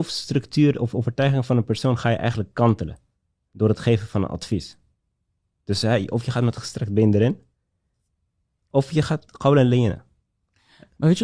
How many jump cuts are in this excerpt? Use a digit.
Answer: 0